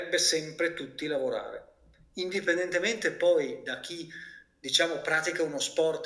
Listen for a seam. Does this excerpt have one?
no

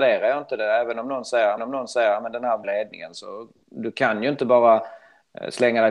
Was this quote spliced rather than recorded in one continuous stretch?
yes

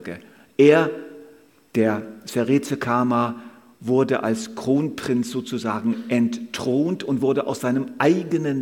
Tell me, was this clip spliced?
no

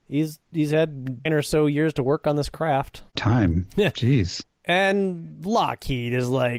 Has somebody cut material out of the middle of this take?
yes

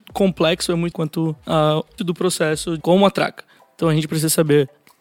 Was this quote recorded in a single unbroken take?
no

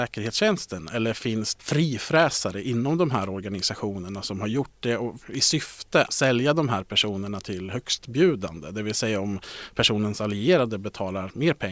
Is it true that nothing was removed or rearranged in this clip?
no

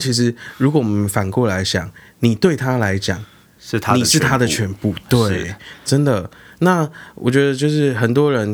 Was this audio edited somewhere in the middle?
no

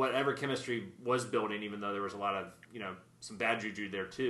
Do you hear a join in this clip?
no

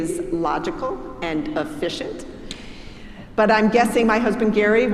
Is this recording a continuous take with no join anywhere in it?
yes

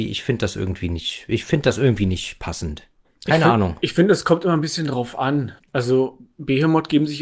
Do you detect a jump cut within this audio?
yes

